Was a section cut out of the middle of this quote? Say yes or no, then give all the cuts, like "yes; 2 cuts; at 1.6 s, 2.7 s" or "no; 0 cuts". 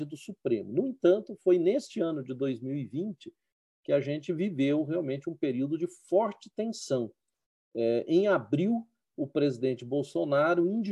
no; 0 cuts